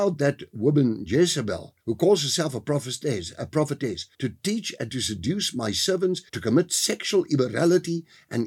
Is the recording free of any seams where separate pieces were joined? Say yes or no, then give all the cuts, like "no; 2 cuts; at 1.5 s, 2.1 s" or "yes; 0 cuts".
no; 3 cuts; at 1.8 s, 4.1 s, 6.3 s